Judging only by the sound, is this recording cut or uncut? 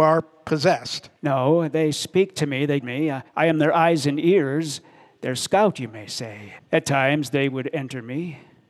cut